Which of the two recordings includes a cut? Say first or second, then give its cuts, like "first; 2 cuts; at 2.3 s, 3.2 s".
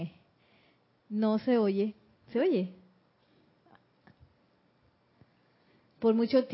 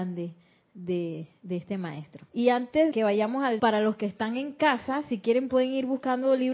second; 3 cuts; at 2.3 s, 2.9 s, 3.6 s